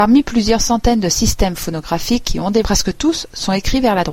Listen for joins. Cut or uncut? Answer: cut